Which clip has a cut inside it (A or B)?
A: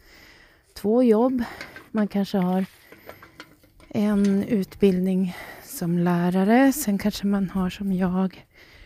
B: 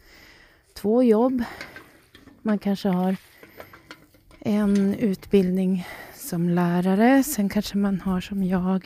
A